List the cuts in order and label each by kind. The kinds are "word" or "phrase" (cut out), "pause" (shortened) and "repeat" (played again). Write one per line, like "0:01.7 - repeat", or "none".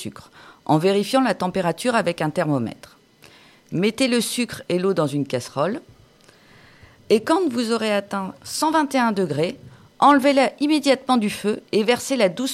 none